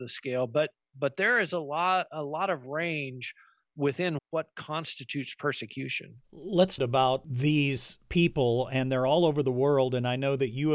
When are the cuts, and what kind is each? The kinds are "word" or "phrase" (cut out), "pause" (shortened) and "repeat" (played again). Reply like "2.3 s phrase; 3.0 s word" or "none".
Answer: 4.2 s word; 6.8 s phrase; 8.0 s pause